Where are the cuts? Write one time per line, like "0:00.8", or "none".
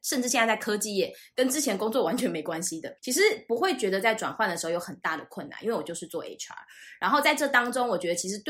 0:03.0